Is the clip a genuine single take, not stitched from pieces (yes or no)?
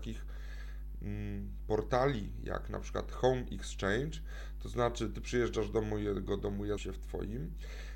no